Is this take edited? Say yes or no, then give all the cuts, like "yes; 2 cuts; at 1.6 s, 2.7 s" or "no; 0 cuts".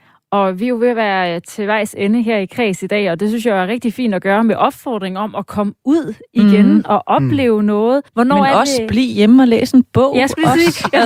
yes; 1 cut; at 8.1 s